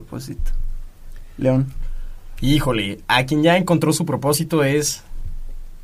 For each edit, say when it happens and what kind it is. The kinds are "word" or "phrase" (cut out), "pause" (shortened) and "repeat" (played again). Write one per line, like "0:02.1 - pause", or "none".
none

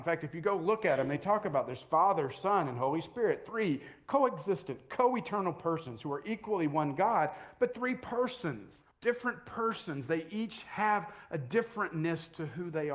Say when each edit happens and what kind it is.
0:08.9 - pause

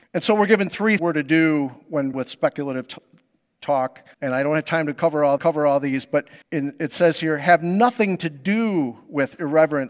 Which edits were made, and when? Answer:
0:01.0 - word
0:02.1 - word
0:04.1 - pause
0:05.4 - repeat
0:06.4 - pause

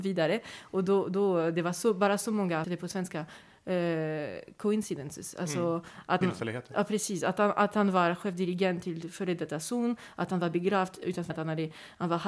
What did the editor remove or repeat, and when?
0:02.6 - word
0:06.2 - word
0:11.3 - word

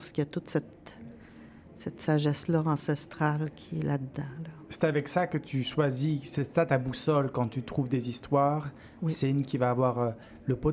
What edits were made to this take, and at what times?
none

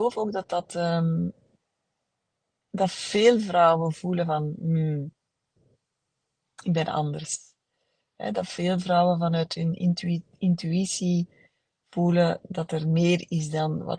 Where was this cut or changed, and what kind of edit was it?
none

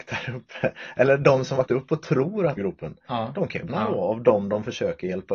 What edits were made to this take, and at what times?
0:01.7 - word
0:02.6 - phrase
0:03.7 - word

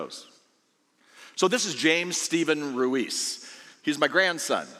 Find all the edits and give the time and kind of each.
none

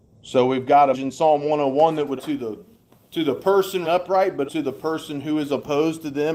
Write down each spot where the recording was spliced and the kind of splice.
0:00.9 - word
0:02.2 - word
0:03.8 - word
0:04.5 - word

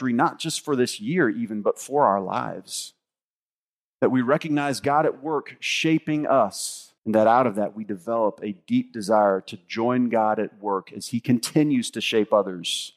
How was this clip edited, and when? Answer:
0:07.0 - pause

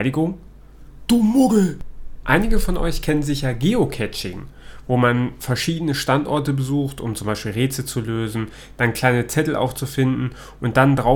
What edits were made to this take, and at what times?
none

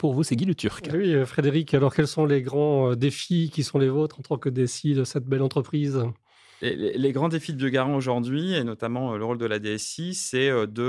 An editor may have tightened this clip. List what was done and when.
none

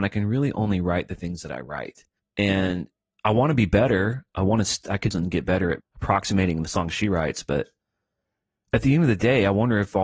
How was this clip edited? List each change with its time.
0:02.2 - pause
0:05.1 - phrase
0:05.8 - word

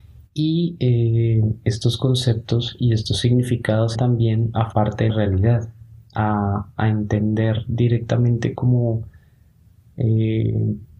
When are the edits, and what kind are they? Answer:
0:03.9 - word
0:04.7 - word
0:05.1 - word

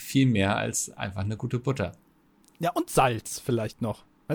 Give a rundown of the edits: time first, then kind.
none

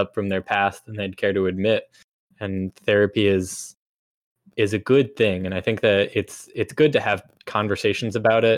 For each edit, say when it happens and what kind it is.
none

